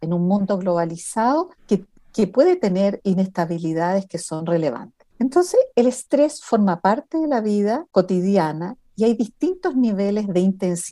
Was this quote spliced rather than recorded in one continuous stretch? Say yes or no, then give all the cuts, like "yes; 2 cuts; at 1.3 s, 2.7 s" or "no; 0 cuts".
yes; 2 cuts; at 1.6 s, 5.1 s